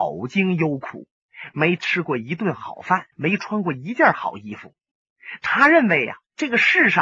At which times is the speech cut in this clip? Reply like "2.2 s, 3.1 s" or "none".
3.1 s